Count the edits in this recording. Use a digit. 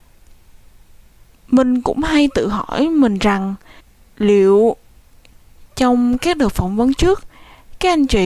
1